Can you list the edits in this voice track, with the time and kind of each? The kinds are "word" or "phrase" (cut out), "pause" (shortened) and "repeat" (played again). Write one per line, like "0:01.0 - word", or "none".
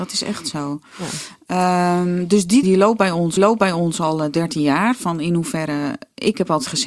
0:02.6 - word
0:03.4 - repeat